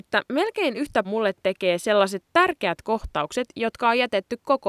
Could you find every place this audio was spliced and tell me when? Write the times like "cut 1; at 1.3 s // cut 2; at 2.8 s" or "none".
cut 1; at 1.0 s